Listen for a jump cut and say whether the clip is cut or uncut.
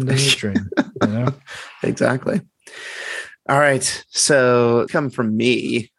cut